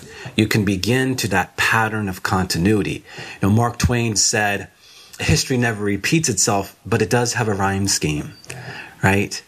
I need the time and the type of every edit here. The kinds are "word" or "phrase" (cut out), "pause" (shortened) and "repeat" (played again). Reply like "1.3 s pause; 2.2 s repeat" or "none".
1.3 s word; 4.1 s word; 5.2 s word